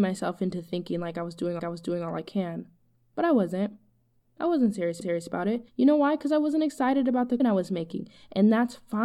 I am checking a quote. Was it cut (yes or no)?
yes